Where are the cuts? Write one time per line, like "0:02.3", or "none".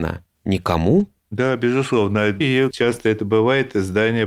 0:02.4
0:02.7